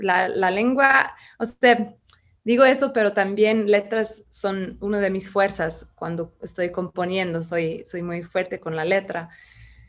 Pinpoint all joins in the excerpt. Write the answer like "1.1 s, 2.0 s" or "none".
none